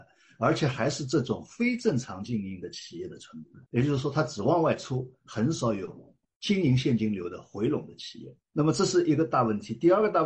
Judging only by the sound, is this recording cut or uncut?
cut